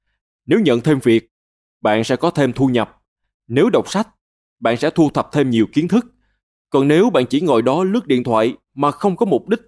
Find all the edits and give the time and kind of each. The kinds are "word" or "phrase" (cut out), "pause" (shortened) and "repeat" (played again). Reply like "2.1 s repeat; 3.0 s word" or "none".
none